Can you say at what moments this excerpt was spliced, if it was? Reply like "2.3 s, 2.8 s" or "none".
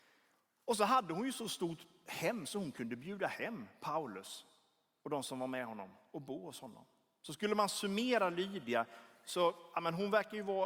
none